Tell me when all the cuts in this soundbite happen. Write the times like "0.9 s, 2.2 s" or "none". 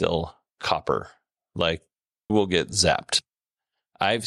2.3 s